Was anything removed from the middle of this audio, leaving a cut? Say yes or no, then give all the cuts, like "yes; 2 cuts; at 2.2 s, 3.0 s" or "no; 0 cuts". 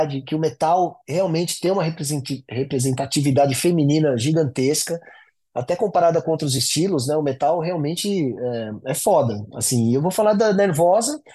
no; 0 cuts